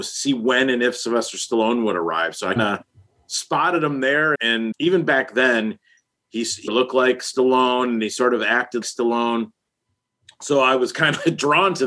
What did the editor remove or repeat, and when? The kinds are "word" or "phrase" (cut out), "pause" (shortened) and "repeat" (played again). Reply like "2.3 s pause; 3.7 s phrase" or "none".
2.6 s word; 4.3 s word; 4.7 s word; 6.7 s word; 8.8 s word